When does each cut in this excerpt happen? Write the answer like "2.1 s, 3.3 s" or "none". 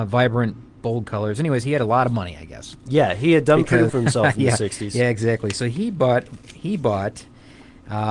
3.9 s